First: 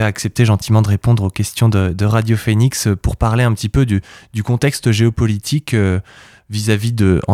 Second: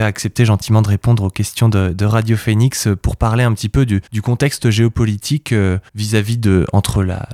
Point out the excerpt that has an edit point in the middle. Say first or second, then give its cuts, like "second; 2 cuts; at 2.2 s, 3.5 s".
second; 2 cuts; at 4.1 s, 5.9 s